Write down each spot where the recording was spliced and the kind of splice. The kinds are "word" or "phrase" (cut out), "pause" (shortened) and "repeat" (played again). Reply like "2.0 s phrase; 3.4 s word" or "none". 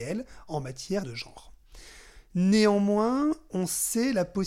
1.0 s word